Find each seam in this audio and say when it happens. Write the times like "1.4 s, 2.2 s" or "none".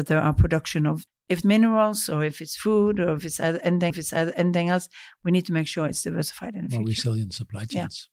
1.1 s, 1.4 s, 3.9 s